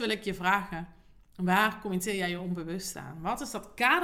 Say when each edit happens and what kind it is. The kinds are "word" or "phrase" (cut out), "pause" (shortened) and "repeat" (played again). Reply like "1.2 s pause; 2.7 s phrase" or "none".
none